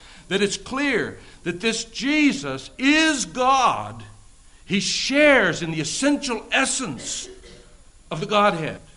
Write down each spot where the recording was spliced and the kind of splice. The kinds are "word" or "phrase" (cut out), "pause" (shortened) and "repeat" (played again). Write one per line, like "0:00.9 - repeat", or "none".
0:08.0 - pause